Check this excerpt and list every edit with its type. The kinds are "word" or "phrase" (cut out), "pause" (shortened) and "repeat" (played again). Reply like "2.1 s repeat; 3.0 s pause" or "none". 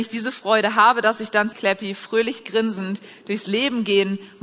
1.5 s phrase